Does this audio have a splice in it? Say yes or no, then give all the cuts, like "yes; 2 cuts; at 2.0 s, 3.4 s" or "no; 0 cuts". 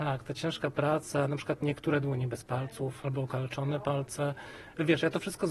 yes; 1 cut; at 1.6 s